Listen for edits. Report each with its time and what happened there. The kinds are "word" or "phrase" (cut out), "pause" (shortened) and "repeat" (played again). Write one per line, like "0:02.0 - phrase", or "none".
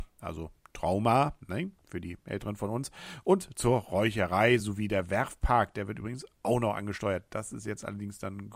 none